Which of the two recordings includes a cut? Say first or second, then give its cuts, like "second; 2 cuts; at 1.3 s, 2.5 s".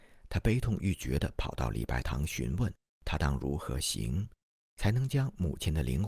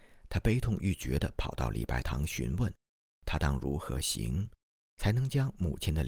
first; 1 cut; at 2.9 s